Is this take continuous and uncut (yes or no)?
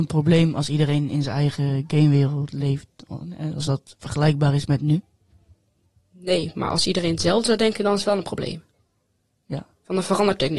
yes